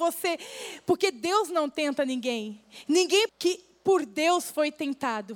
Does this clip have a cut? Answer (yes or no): yes